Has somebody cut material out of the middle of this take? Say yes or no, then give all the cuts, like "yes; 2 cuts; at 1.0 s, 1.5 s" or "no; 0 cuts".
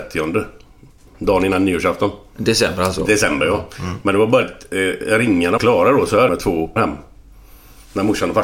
yes; 5 cuts; at 1.1 s, 4.4 s, 5.6 s, 6.3 s, 6.8 s